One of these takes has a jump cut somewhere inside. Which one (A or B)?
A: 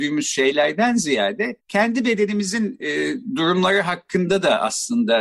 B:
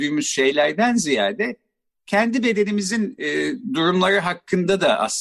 A